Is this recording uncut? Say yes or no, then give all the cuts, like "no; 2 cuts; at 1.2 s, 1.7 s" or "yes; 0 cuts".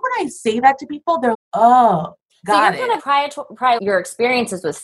no; 4 cuts; at 1.3 s, 2.3 s, 3.0 s, 3.8 s